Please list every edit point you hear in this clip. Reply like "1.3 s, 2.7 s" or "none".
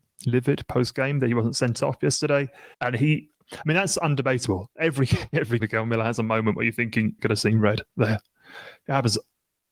2.7 s, 5.6 s, 7.2 s, 7.9 s